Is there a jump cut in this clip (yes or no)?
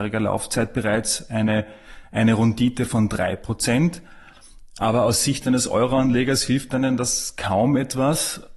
no